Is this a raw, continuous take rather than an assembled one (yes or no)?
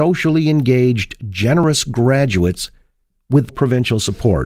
no